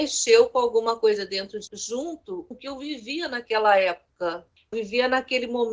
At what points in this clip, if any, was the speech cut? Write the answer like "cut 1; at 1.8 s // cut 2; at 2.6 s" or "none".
cut 1; at 1.7 s // cut 2; at 2.5 s // cut 3; at 4.7 s